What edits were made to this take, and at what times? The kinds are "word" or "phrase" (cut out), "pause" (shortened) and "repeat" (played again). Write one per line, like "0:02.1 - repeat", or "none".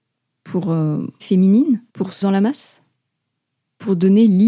0:01.2 - word
0:01.9 - pause
0:02.2 - word